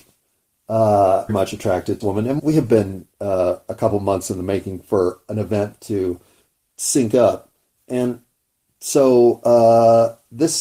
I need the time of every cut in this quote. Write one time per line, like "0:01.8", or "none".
0:01.3
0:02.0
0:02.4